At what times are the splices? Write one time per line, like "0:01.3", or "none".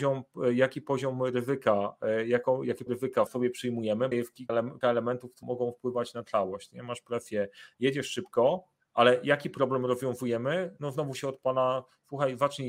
0:02.9
0:03.3
0:04.1
0:04.5
0:04.8
0:05.4